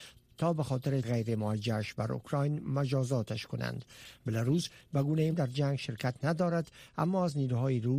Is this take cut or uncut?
cut